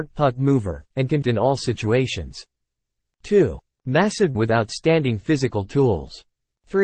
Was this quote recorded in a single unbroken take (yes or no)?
no